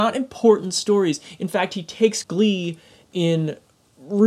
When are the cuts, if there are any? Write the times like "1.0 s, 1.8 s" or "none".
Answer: 2.2 s